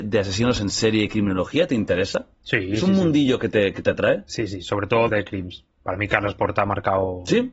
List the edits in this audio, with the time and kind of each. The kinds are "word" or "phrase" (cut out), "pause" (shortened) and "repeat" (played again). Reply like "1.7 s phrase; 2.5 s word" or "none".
5.1 s word

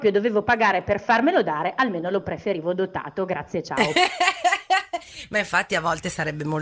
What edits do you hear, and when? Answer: none

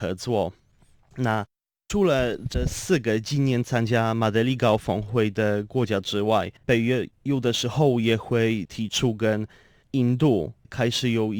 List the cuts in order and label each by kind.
6.6 s pause

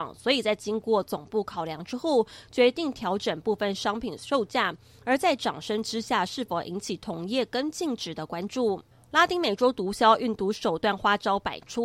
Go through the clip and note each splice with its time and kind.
none

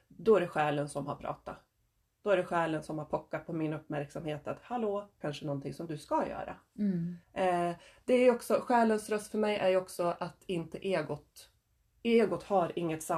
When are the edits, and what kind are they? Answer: 5.2 s phrase; 7.2 s pause

